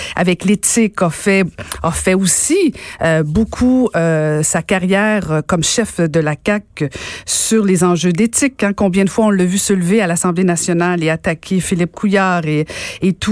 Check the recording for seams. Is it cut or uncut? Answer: uncut